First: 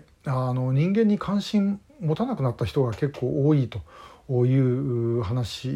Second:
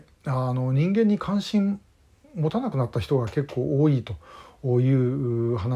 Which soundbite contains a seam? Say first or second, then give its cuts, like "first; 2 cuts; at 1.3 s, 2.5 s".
first; 1 cut; at 1.9 s